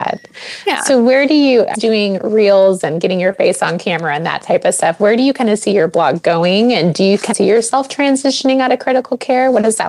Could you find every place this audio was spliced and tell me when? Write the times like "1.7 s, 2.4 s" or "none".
1.7 s, 7.3 s